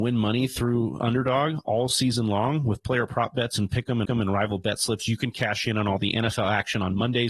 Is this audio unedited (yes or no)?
no